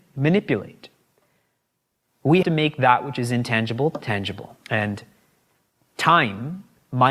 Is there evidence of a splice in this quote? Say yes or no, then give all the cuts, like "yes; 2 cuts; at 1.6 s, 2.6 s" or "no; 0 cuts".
yes; 2 cuts; at 2.4 s, 4.6 s